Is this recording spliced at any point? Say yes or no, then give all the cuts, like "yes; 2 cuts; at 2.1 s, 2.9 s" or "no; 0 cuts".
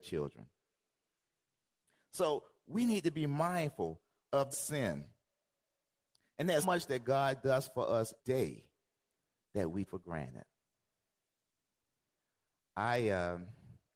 yes; 4 cuts; at 4.5 s, 6.6 s, 8.2 s, 9.9 s